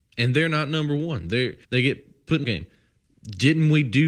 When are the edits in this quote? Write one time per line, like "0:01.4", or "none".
0:01.6
0:02.4